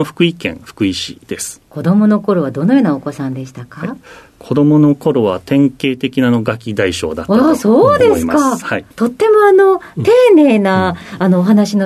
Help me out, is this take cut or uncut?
cut